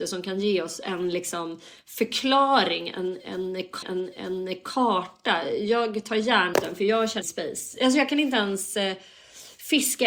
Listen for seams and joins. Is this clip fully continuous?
no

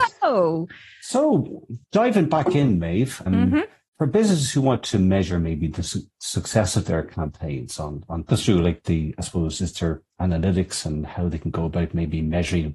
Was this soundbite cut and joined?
yes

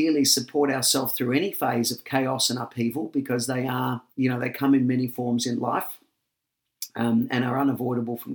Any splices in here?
yes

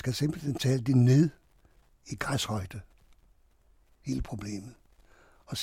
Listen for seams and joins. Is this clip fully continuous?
yes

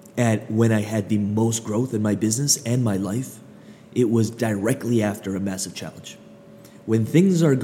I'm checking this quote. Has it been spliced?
no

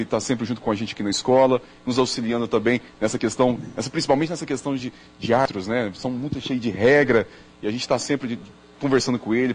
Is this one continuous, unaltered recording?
yes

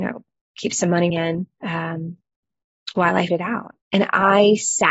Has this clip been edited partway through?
yes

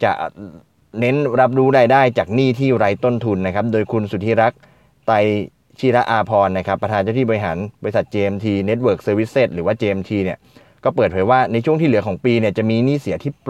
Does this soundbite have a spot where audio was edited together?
no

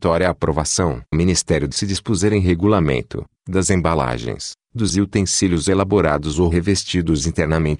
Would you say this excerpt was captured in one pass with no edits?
no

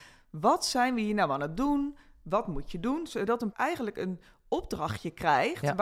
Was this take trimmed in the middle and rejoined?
yes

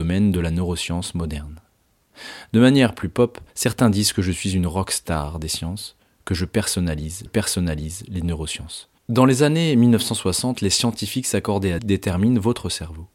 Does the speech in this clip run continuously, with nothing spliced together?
no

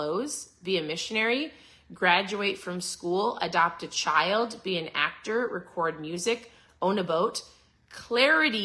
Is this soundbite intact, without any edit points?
yes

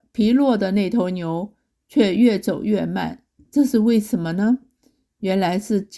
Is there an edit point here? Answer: no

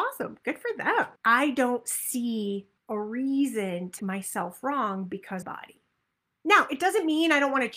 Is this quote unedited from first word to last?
no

